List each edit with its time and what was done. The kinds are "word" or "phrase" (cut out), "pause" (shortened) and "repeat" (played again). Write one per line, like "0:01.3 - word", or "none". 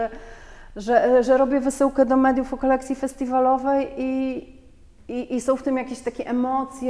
none